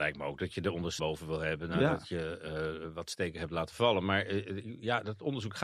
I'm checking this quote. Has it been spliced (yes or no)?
yes